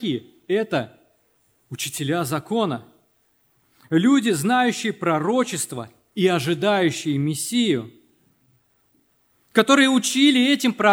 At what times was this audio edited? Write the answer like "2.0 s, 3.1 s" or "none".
none